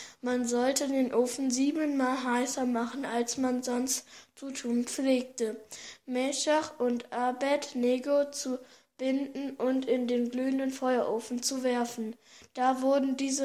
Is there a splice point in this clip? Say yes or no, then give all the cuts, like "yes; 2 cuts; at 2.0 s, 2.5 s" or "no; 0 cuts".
no; 0 cuts